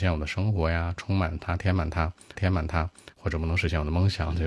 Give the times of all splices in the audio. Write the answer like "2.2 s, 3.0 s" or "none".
2.4 s